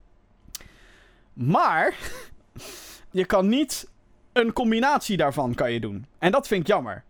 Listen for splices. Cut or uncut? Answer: cut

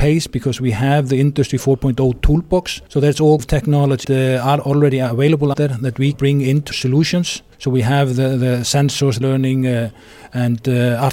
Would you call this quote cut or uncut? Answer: cut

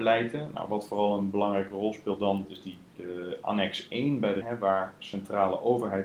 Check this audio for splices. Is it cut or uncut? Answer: cut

